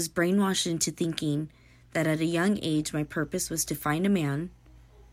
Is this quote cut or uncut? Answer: uncut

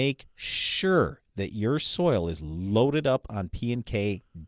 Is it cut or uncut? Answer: uncut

